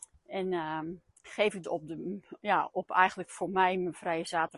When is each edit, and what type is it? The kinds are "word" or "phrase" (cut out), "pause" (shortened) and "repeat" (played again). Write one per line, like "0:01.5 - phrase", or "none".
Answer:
0:01.1 - pause
0:01.6 - word